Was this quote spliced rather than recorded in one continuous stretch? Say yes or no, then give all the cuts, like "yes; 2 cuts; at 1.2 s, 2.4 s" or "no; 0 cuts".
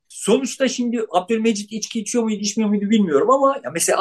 no; 0 cuts